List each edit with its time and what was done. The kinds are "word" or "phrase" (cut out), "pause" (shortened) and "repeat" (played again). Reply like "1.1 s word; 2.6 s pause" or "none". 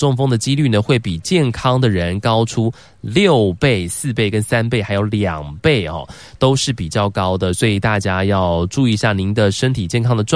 none